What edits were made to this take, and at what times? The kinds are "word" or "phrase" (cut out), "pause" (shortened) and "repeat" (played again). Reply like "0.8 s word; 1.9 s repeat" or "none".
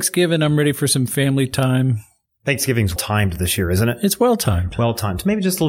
3.0 s word